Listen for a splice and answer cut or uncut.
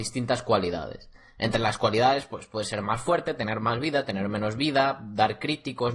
uncut